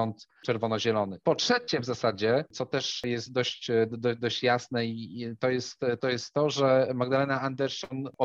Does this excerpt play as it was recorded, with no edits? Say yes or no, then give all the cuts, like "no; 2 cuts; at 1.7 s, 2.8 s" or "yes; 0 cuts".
yes; 0 cuts